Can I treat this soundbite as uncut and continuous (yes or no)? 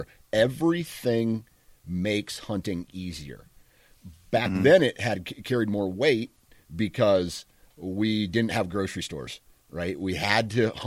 yes